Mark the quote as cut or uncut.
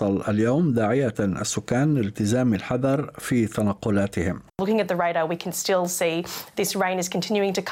cut